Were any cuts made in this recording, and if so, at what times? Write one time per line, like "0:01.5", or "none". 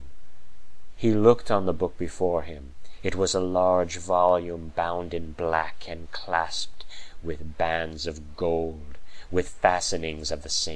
none